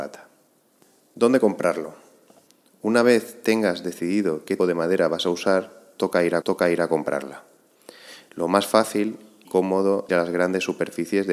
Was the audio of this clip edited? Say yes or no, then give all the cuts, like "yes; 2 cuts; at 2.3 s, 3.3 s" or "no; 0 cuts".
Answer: yes; 4 cuts; at 4.6 s, 6.4 s, 9.4 s, 10.1 s